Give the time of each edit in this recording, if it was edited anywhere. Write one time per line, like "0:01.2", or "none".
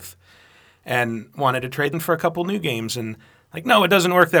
0:01.9

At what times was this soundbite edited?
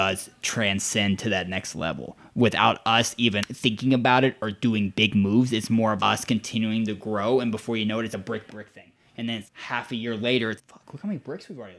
0:03.4
0:06.0
0:08.1
0:08.5
0:09.5
0:10.6

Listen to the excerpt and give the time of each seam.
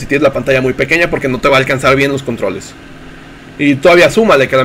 none

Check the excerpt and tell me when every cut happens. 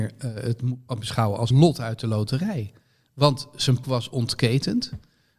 0:01.0
0:01.5
0:03.8

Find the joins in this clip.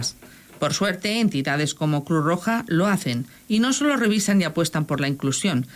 none

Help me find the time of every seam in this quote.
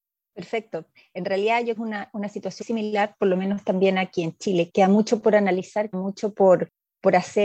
0:01.8
0:02.6
0:04.7
0:05.9

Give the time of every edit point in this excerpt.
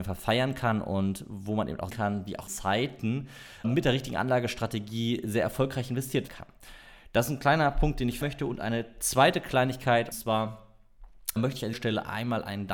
0:01.9
0:02.5
0:03.6
0:06.3
0:08.2
0:10.1
0:11.4
0:11.7

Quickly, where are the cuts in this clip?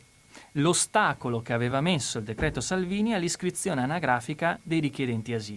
none

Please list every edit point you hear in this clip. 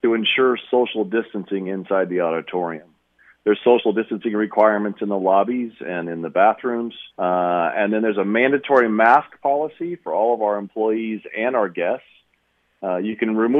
0:07.1

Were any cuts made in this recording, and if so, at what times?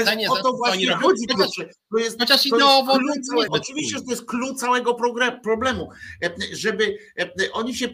0:03.5

